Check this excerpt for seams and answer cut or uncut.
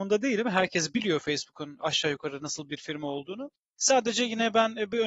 uncut